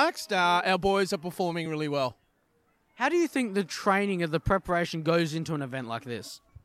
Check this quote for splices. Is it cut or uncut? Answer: uncut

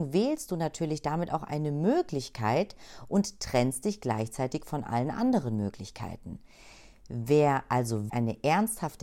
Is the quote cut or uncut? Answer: cut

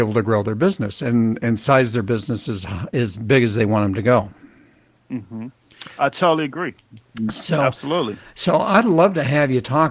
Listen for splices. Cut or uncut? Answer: uncut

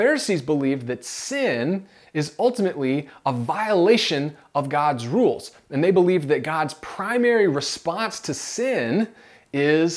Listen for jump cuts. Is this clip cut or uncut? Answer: uncut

